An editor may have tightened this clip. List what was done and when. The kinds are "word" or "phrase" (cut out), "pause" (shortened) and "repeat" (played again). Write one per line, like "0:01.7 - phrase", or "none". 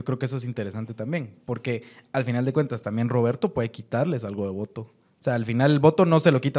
none